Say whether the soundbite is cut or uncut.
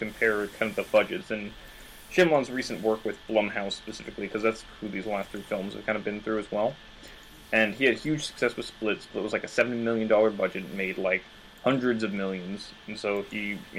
uncut